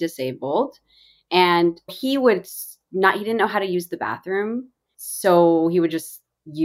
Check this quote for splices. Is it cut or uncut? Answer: cut